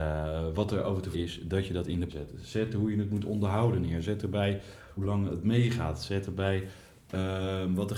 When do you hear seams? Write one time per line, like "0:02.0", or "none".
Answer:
0:01.1
0:02.1
0:05.0